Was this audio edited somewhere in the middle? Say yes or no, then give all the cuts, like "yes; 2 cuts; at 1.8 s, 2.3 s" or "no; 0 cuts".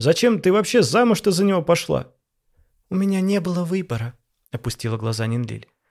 no; 0 cuts